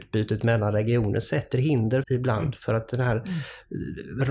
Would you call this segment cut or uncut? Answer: cut